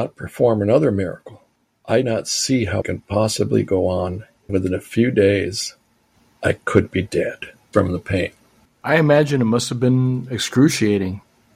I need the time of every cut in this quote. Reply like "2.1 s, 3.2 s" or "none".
2.0 s, 2.8 s, 4.5 s, 7.7 s